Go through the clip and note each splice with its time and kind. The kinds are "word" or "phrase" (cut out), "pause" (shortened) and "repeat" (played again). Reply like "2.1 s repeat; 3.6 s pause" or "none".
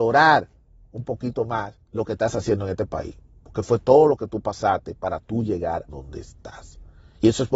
1.8 s pause; 5.9 s word